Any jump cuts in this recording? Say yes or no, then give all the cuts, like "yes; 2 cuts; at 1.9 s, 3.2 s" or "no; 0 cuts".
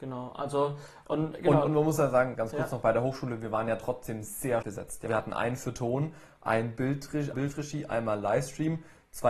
yes; 4 cuts; at 2.4 s, 4.6 s, 5.1 s, 7.3 s